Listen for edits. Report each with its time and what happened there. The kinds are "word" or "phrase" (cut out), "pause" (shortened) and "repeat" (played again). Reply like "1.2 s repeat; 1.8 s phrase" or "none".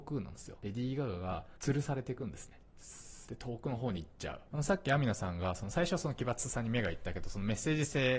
1.5 s pause; 3.2 s pause; 4.5 s pause